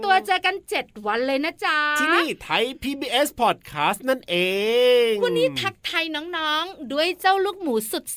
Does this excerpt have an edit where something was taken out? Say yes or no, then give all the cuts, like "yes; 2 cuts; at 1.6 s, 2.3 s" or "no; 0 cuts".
no; 0 cuts